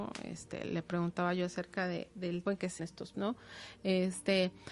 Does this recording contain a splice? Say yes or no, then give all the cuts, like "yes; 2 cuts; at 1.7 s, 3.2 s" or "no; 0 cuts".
yes; 3 cuts; at 2.5 s, 2.8 s, 3.1 s